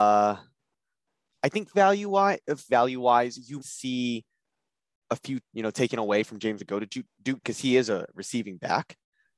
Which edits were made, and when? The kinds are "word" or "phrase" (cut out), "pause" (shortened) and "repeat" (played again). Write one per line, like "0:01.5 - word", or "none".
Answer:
0:01.7 - word
0:02.7 - word
0:03.6 - word
0:05.4 - word
0:06.6 - word
0:07.4 - word